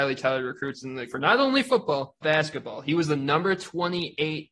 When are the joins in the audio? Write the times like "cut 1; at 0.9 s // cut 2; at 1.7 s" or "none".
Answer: cut 1; at 1.1 s // cut 2; at 2.2 s

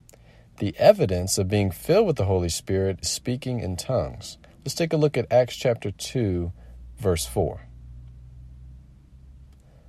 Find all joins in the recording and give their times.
cut 1; at 3.0 s

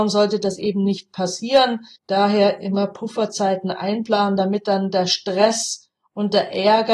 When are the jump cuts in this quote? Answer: cut 1; at 2.0 s

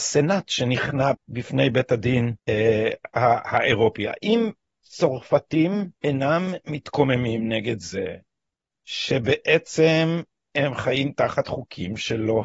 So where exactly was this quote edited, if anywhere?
cut 1; at 1.1 s // cut 2; at 2.4 s // cut 3; at 4.7 s // cut 4; at 5.9 s

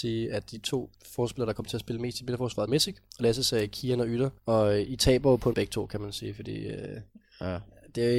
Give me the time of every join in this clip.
cut 1; at 0.9 s // cut 2; at 2.7 s // cut 3; at 4.4 s // cut 4; at 5.5 s

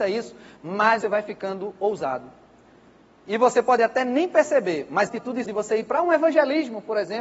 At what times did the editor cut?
cut 1; at 1.0 s // cut 2; at 5.1 s // cut 3; at 5.4 s

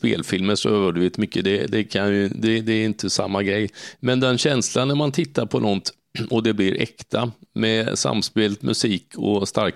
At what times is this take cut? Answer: none

